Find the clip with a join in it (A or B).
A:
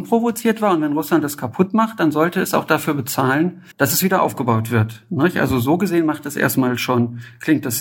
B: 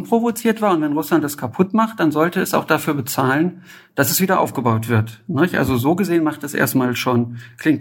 A